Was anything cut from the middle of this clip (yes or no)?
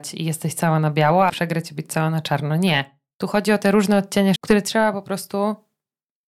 yes